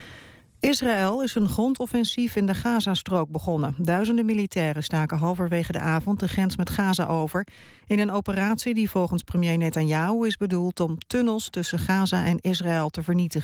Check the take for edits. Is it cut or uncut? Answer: uncut